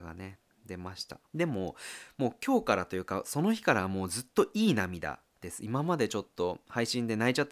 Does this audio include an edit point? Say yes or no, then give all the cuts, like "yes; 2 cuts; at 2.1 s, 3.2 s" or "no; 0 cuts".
yes; 1 cut; at 1.3 s